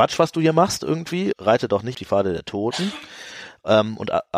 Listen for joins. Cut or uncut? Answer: cut